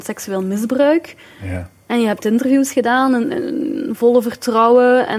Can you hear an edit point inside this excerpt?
no; 0 cuts

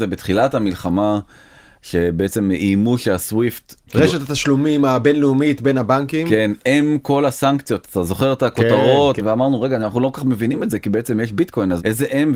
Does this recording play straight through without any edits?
yes; 0 cuts

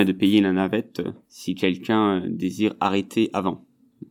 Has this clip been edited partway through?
yes; 1 cut; at 1.2 s

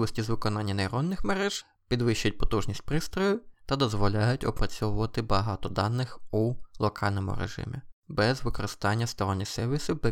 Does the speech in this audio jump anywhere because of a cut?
no; 0 cuts

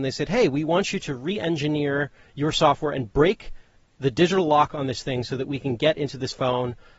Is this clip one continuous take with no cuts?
yes; 0 cuts

